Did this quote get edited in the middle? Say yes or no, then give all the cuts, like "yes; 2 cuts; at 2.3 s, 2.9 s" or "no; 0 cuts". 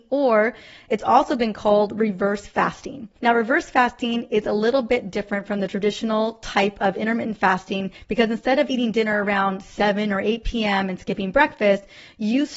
yes; 1 cut; at 3.2 s